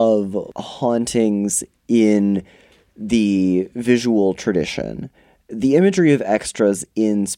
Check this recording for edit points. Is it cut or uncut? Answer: uncut